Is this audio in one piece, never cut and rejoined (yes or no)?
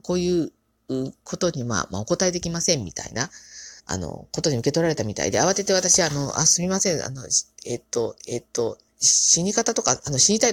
no